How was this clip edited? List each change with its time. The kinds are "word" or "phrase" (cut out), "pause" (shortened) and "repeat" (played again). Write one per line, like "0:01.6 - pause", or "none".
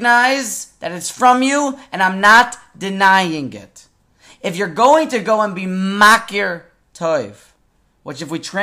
none